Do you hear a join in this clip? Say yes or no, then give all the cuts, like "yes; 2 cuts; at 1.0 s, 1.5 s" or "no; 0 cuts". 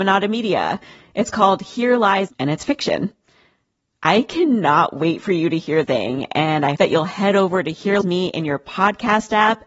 yes; 4 cuts; at 2.3 s, 5.8 s, 6.8 s, 8.0 s